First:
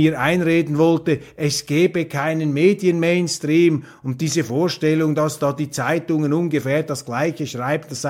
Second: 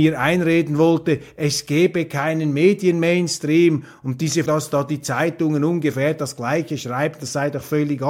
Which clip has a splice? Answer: second; 1 cut; at 4.5 s

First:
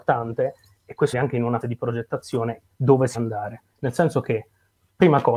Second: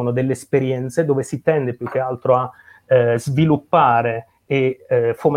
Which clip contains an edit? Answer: first; 4 cuts; at 1.1 s, 1.6 s, 2.7 s, 3.1 s

